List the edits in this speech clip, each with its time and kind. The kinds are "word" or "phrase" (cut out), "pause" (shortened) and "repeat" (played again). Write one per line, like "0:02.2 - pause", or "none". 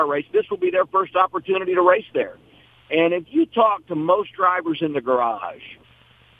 none